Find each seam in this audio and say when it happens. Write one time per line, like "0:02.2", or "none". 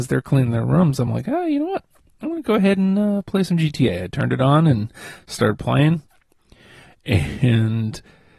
none

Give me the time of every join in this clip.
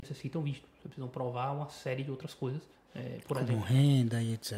0:02.7

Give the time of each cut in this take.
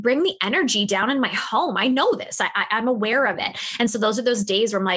none

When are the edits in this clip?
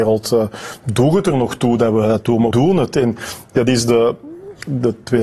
0:02.5

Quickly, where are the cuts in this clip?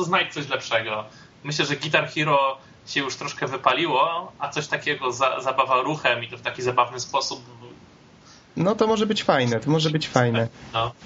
none

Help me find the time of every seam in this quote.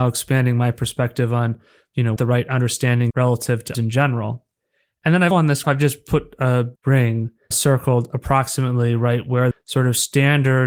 0:02.2
0:03.1
0:03.7
0:05.3
0:05.6
0:06.8
0:07.5
0:09.5

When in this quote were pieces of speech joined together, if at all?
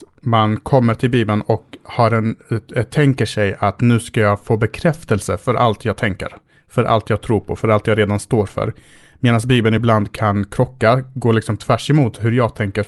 none

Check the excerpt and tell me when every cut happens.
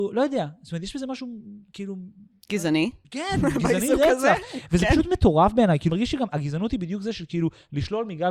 0:03.0
0:05.9

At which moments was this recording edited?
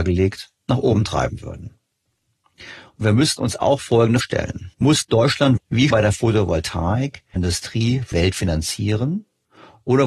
0:04.2
0:04.7
0:05.6
0:05.9
0:07.4
0:08.1

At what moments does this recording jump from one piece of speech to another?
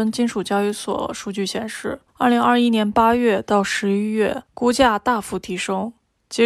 0:02.1
0:04.5

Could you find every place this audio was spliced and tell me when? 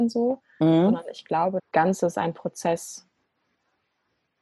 0:01.6

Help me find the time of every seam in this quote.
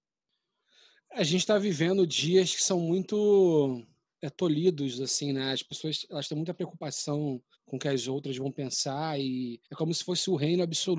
0:04.1
0:07.5
0:09.6

